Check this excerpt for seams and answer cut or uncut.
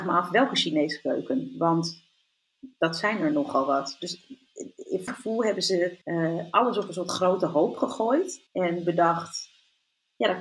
cut